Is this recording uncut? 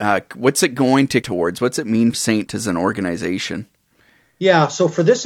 no; 3 cuts; at 1.2 s, 2.1 s, 2.5 s

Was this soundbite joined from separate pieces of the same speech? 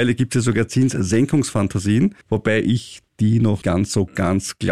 yes; 2 cuts; at 2.2 s, 3.6 s

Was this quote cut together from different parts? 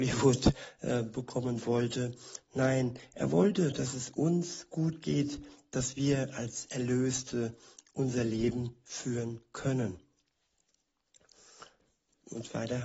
no; 0 cuts

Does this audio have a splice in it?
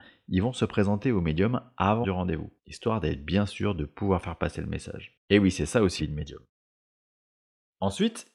yes; 4 cuts; at 2.0 s, 2.6 s, 5.2 s, 6.0 s

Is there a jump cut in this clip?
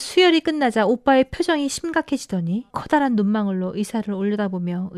yes; 1 cut; at 2.7 s

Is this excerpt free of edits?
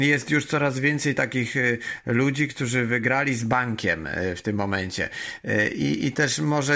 yes; 0 cuts

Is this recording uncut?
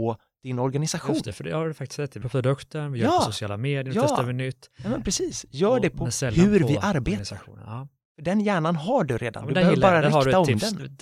no; 1 cut; at 2.2 s

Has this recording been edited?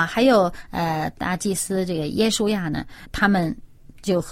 yes; 1 cut; at 3.0 s

